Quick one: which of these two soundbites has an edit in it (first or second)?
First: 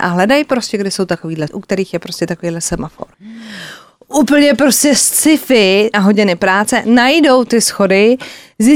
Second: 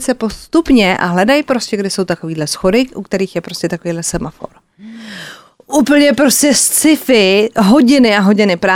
first